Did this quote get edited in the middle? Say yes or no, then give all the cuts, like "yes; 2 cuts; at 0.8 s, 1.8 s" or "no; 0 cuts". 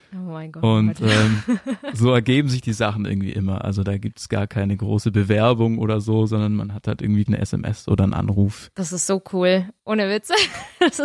yes; 1 cut; at 7.3 s